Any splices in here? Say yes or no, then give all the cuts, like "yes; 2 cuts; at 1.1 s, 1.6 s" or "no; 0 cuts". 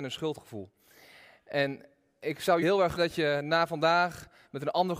yes; 2 cuts; at 2.6 s, 3.0 s